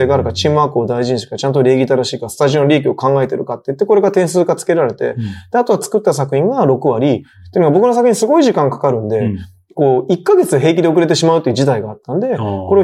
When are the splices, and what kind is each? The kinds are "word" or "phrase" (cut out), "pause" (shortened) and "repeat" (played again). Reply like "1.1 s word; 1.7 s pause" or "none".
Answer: none